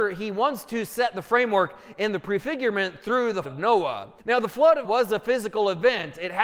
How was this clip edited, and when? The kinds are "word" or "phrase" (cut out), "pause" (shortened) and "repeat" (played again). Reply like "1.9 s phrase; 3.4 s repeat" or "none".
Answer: 3.4 s word; 4.2 s pause; 4.8 s word